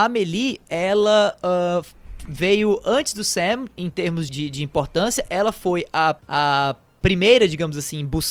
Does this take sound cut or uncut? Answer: cut